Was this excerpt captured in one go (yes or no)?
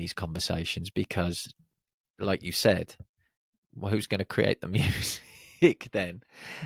yes